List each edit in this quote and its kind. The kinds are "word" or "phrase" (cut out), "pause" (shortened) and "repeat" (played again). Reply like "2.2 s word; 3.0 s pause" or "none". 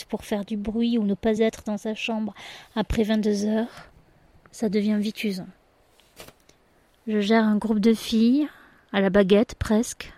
none